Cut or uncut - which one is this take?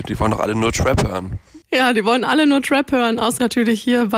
uncut